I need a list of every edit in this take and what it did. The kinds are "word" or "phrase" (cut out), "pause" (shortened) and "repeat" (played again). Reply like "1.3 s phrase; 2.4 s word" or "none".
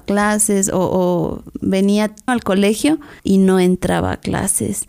2.3 s word; 3.2 s pause